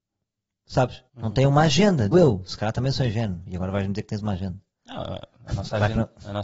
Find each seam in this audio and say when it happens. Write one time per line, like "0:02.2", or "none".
0:01.1
0:02.1